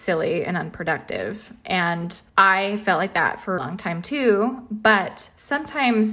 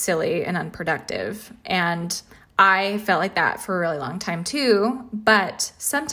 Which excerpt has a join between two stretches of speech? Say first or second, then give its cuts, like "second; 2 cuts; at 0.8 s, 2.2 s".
first; 2 cuts; at 2.3 s, 3.6 s